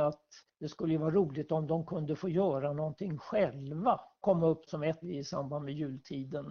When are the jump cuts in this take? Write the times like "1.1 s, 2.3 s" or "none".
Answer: 4.2 s, 4.7 s, 5.0 s